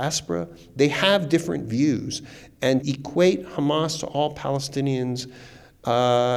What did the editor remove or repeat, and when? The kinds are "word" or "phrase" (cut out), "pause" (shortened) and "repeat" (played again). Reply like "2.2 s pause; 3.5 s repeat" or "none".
2.8 s word